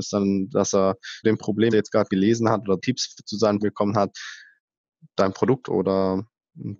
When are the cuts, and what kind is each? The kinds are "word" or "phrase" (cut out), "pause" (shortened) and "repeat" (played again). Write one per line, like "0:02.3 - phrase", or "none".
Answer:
0:01.2 - word
0:01.7 - word
0:02.1 - word
0:02.8 - word
0:03.6 - word
0:05.6 - word